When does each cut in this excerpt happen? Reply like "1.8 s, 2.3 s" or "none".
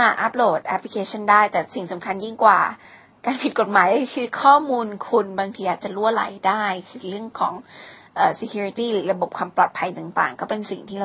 none